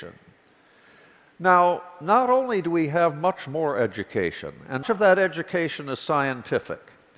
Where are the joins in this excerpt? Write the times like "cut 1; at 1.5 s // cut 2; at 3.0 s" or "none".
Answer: cut 1; at 4.8 s